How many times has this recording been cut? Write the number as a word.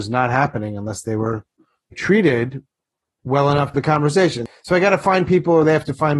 two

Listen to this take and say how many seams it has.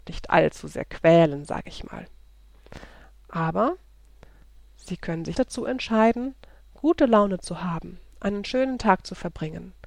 one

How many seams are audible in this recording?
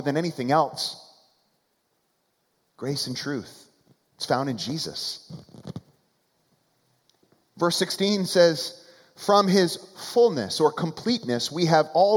zero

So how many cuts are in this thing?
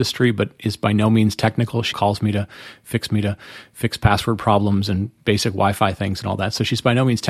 two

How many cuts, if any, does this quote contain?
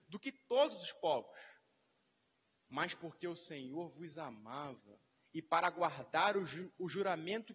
zero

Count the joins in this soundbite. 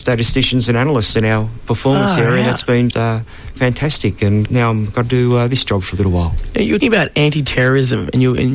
five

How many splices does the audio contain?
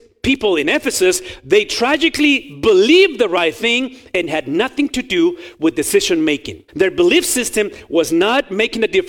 one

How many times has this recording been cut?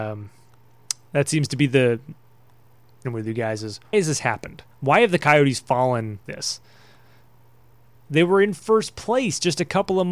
four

